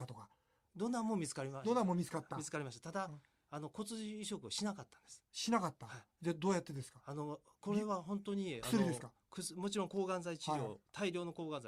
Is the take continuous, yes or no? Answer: yes